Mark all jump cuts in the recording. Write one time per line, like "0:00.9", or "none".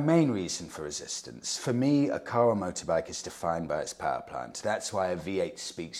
none